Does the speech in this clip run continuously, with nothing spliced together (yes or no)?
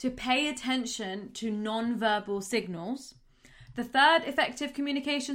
yes